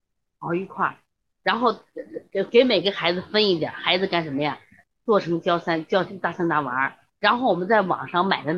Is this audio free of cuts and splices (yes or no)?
yes